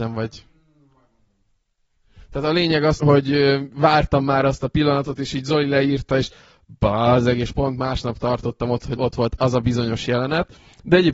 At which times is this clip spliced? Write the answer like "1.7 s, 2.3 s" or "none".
3.0 s, 9.0 s